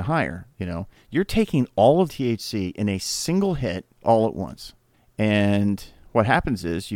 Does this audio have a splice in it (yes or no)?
yes